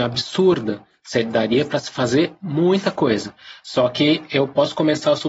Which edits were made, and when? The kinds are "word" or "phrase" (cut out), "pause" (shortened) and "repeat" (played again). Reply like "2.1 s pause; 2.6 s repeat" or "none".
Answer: none